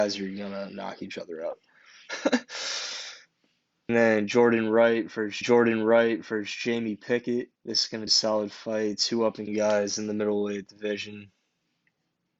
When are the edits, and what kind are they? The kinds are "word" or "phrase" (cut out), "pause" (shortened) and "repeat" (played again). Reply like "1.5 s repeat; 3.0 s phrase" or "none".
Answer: 3.9 s word; 5.4 s repeat; 7.6 s pause; 8.1 s word; 9.5 s word